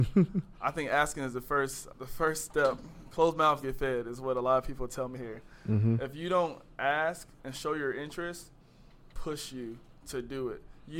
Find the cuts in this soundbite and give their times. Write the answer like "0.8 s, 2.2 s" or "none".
1.9 s, 3.6 s, 5.1 s, 7.4 s, 9.1 s